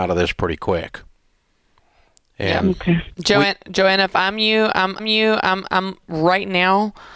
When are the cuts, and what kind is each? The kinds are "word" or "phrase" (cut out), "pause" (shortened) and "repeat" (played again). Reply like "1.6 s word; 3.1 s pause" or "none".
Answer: 3.1 s pause; 5.0 s repeat